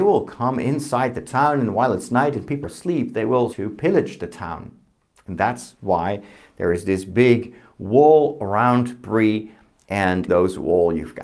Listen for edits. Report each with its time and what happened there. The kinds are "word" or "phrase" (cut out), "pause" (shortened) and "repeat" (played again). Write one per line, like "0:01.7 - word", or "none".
0:02.6 - word
0:03.5 - word
0:10.3 - word